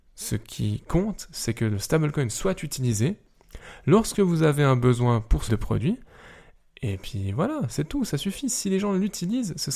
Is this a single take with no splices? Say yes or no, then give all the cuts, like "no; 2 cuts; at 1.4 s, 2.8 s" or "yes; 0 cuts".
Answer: no; 1 cut; at 5.5 s